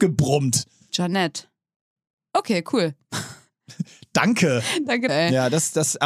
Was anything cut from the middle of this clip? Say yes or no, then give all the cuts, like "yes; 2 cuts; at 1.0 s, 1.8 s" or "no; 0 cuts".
yes; 1 cut; at 5.1 s